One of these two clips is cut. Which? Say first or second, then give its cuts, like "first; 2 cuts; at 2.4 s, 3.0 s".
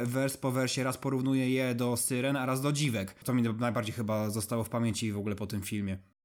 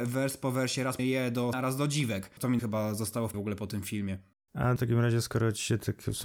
second; 5 cuts; at 1.0 s, 1.5 s, 2.6 s, 3.3 s, 4.8 s